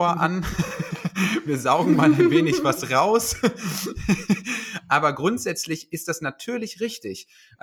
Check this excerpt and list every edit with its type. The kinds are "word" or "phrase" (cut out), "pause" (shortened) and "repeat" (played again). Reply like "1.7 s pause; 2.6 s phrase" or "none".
none